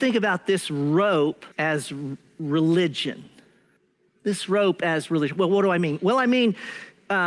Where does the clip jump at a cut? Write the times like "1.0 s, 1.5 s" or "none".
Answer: 1.5 s, 3.8 s